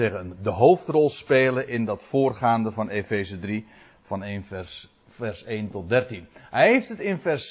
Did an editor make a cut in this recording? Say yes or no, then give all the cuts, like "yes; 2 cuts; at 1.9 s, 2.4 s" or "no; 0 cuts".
no; 0 cuts